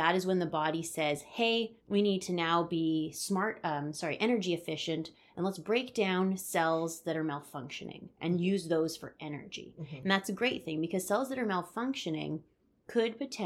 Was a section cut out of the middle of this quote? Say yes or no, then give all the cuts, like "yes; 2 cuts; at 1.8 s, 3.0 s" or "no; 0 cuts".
yes; 1 cut; at 1.8 s